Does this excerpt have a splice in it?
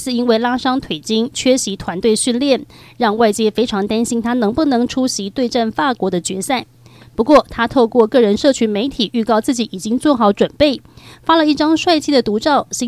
no; 0 cuts

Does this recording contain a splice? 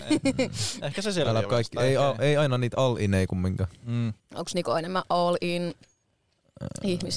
yes; 2 cuts; at 1.4 s, 4.2 s

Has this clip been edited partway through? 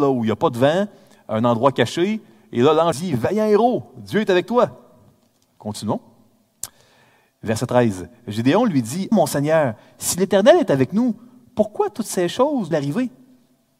yes; 3 cuts; at 2.9 s, 9.1 s, 12.7 s

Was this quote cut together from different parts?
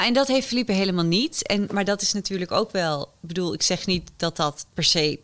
no; 0 cuts

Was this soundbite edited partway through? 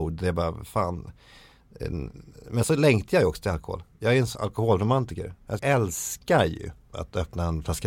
yes; 4 cuts; at 2.6 s, 4.3 s, 5.6 s, 6.9 s

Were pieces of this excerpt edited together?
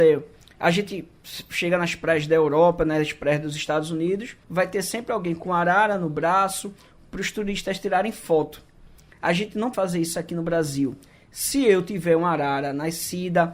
yes; 2 cuts; at 4.4 s, 9.7 s

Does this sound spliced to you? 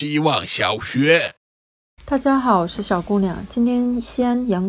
yes; 1 cut; at 1.8 s

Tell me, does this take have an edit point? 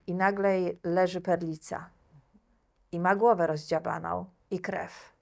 no; 0 cuts

